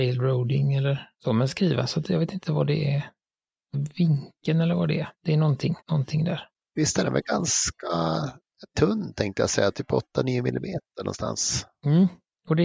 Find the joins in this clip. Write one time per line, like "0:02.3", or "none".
0:01.1
0:01.5
0:03.7
0:05.1
0:05.8
0:06.5

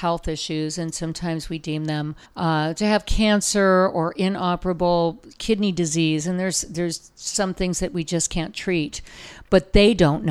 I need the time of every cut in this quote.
0:02.2

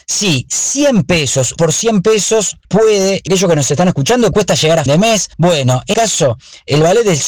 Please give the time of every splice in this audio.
0:01.6
0:02.6
0:03.3
0:04.3
0:04.9
0:05.3
0:05.9

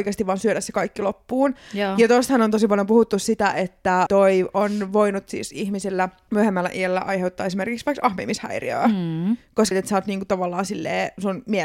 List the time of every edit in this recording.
0:04.1
0:09.7

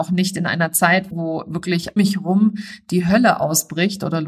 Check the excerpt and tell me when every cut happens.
0:01.1
0:02.0

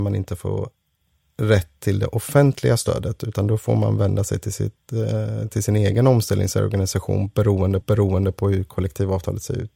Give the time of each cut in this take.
0:07.8

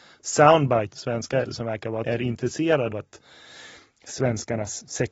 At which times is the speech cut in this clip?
0:00.9
0:01.5
0:02.0
0:02.9

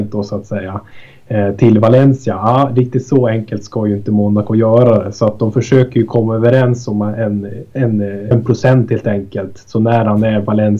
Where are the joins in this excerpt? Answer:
0:08.3

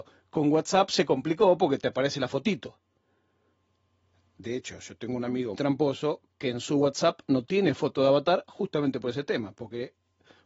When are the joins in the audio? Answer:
0:05.5

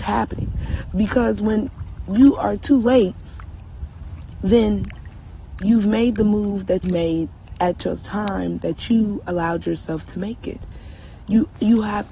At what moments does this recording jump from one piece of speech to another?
0:06.8

